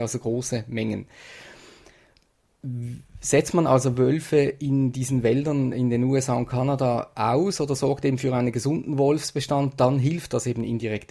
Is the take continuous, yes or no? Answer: yes